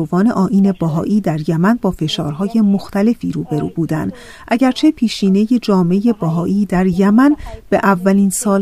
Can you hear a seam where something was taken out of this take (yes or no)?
no